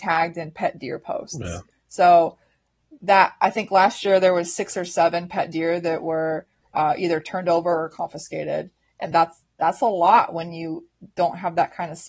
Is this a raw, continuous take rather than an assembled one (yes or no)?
yes